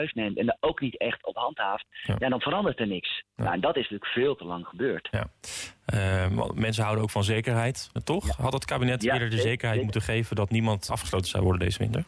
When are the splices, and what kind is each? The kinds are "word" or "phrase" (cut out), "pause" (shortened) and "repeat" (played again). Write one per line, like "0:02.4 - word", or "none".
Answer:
0:08.0 - word
0:10.9 - word

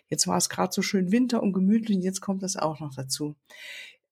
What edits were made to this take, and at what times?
none

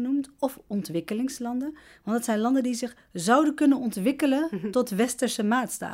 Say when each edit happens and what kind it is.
none

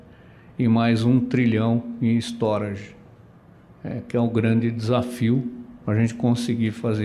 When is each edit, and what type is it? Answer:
none

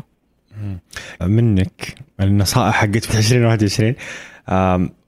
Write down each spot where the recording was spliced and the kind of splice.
0:01.2 - phrase
0:03.1 - word

